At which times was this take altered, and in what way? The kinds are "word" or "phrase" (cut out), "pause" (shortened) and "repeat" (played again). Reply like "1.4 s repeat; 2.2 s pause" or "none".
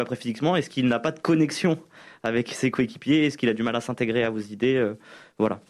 none